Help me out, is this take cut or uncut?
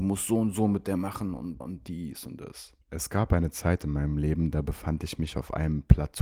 cut